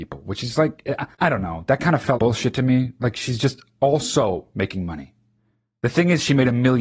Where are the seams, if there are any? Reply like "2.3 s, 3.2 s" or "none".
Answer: 1.1 s, 2.2 s